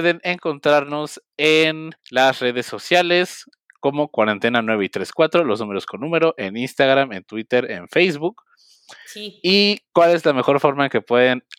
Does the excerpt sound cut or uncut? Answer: cut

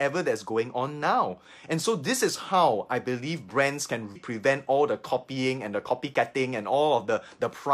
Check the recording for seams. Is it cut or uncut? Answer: cut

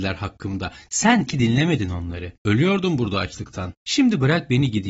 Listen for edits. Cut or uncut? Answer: cut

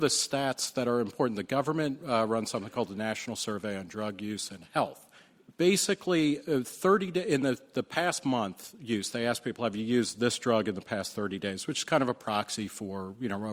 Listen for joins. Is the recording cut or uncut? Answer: uncut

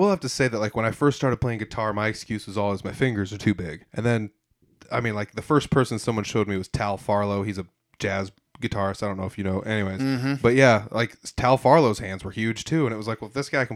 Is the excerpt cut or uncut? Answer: cut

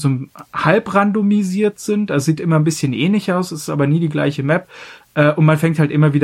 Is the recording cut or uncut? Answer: uncut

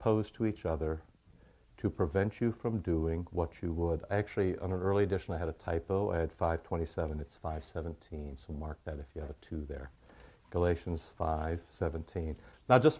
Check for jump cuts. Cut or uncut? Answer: uncut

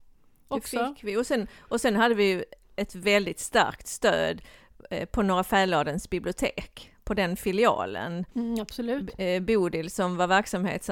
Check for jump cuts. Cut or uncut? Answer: cut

